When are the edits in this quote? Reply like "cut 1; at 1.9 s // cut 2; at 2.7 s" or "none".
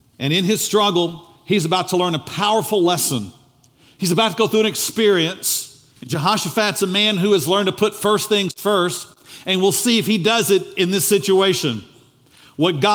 cut 1; at 6.0 s